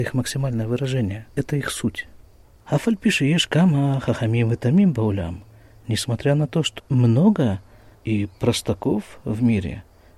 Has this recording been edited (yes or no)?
yes